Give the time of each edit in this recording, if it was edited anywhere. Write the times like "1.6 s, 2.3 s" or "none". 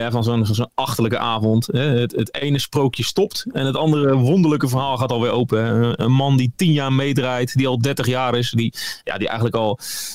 none